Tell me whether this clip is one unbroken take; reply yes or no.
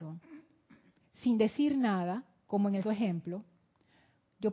no